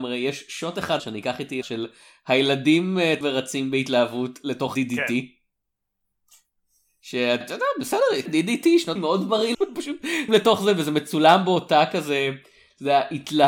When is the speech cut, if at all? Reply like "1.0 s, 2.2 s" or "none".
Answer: 1.0 s, 1.6 s, 3.2 s, 4.7 s, 7.4 s, 8.3 s, 9.0 s, 9.5 s, 10.3 s